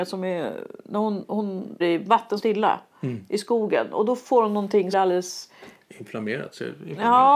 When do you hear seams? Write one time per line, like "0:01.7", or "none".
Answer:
0:01.8
0:02.4
0:04.9